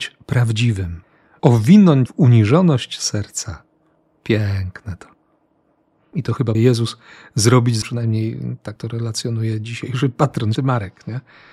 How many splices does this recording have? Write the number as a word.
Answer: five